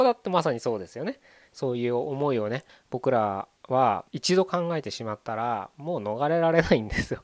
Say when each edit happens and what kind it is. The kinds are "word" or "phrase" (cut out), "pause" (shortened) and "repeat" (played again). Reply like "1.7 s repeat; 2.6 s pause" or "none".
2.7 s pause; 4.1 s pause